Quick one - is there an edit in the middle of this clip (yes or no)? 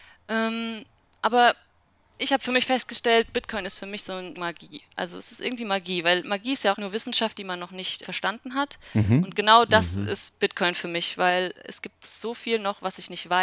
yes